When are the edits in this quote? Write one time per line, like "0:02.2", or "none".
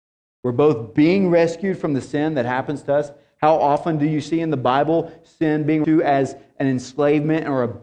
0:05.8